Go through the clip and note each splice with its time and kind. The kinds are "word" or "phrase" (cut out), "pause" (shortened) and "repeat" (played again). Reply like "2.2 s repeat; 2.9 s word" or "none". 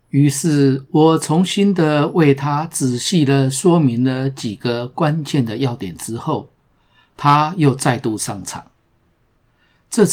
none